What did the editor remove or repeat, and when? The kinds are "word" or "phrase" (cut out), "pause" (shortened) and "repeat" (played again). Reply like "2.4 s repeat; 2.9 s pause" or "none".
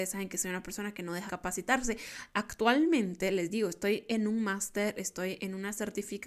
1.3 s word

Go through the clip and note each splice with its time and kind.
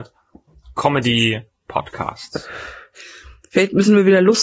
1.7 s word

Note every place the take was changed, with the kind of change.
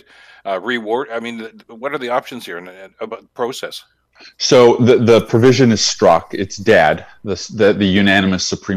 none

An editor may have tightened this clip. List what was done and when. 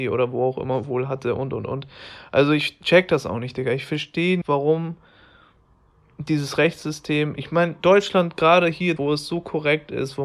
4.4 s word; 9.0 s word

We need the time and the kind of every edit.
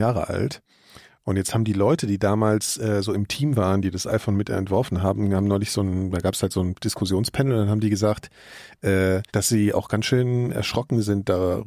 9.3 s pause

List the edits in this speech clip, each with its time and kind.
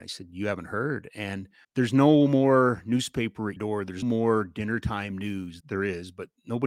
1.6 s pause; 3.6 s word; 4.0 s word; 5.6 s word

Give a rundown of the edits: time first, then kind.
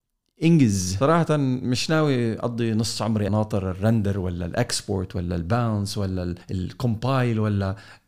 3.3 s word; 6.4 s pause

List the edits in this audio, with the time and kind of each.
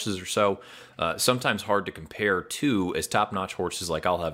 none

